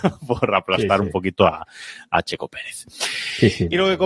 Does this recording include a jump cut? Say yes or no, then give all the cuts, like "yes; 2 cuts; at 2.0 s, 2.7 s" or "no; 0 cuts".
no; 0 cuts